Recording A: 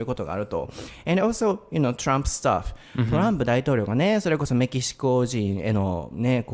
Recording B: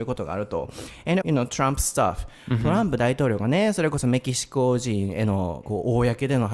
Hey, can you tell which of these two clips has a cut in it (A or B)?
B